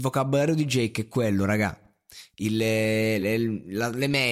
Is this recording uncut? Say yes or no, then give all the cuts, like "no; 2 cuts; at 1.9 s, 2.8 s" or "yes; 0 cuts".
yes; 0 cuts